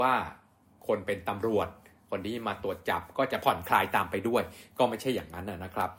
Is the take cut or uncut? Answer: uncut